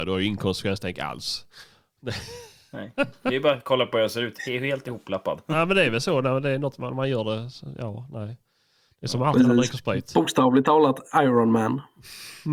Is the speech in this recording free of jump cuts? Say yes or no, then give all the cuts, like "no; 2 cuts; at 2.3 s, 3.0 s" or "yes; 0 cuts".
yes; 0 cuts